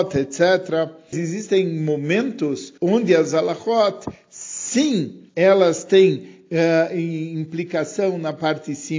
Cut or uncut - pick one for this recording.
cut